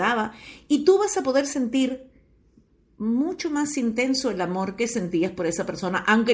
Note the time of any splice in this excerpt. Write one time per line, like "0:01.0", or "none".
none